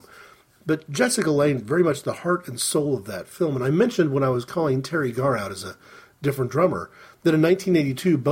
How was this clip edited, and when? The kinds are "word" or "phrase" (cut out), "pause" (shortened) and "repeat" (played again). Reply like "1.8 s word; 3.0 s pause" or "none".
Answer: none

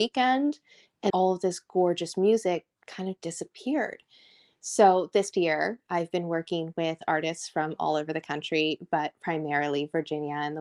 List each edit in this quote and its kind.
1.1 s word; 5.3 s word

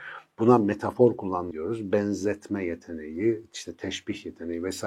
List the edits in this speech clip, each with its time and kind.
1.5 s word

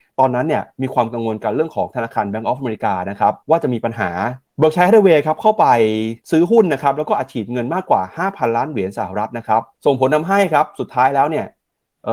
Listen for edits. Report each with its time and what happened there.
3.4 s pause; 4.5 s pause; 6.2 s pause; 9.7 s pause

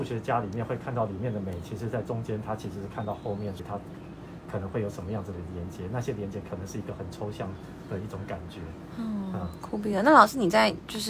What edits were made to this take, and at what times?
3.6 s phrase

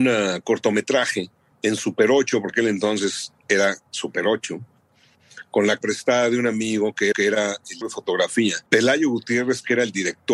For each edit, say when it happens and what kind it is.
1.5 s pause; 2.5 s word; 5.8 s word; 7.1 s repeat; 7.8 s word; 8.7 s pause

